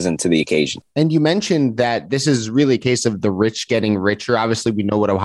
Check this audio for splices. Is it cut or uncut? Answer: uncut